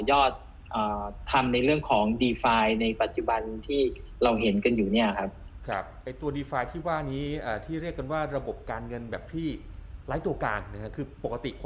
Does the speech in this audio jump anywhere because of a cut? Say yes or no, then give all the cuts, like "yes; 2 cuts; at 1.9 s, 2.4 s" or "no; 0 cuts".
no; 0 cuts